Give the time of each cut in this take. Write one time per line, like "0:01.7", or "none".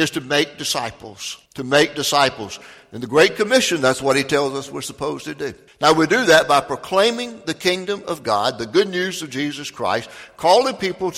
0:01.5
0:05.7